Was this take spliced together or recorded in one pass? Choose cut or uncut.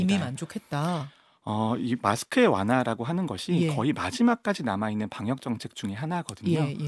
uncut